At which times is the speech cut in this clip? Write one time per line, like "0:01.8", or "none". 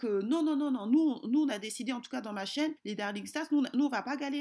0:02.8